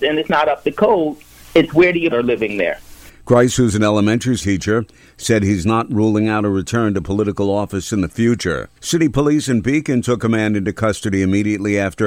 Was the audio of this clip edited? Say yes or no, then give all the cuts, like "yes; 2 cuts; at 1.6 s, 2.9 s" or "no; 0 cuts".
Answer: yes; 3 cuts; at 2.1 s, 4.4 s, 8.8 s